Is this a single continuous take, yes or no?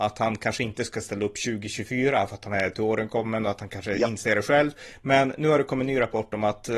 yes